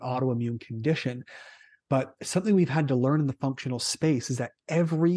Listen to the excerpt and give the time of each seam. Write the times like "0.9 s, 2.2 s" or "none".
none

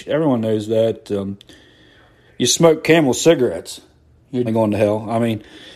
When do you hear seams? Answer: 4.5 s

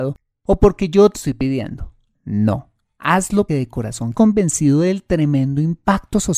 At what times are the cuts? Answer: 1.1 s, 3.5 s, 4.1 s

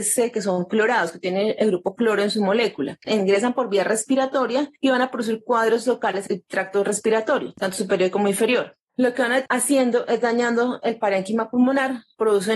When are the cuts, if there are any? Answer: 6.3 s, 9.5 s

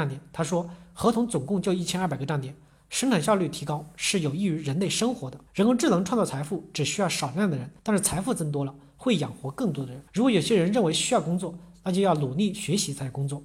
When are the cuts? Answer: 5.5 s, 7.8 s, 10.1 s

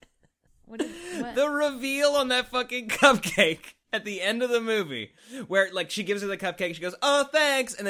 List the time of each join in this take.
3.8 s

